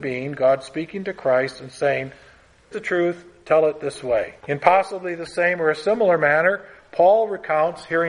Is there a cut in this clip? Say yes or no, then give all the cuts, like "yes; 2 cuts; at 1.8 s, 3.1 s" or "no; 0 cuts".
yes; 2 cuts; at 2.7 s, 4.4 s